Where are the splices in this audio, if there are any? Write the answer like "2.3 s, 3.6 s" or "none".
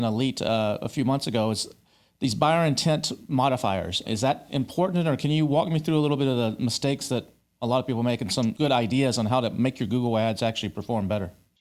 4.1 s